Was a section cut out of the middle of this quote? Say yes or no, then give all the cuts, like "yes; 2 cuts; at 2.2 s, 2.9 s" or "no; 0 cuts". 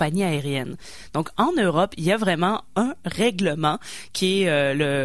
no; 0 cuts